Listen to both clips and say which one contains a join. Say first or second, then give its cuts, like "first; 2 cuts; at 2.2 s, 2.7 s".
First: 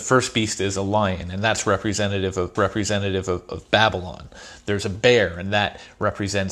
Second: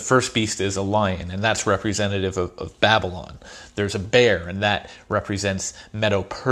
first; 1 cut; at 2.6 s